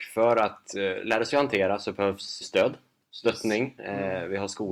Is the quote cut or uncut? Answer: cut